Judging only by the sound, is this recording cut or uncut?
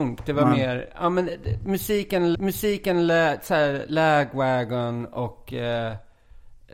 cut